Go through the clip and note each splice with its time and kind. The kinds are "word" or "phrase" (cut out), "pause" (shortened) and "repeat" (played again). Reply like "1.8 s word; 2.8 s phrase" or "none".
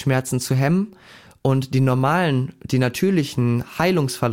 none